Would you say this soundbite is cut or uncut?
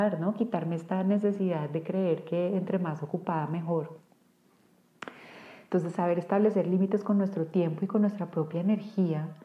uncut